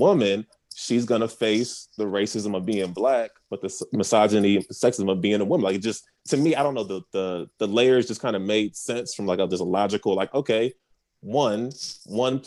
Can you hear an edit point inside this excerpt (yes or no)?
no